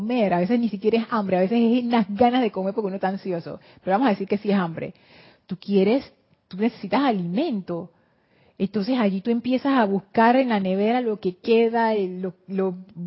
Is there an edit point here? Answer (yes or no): no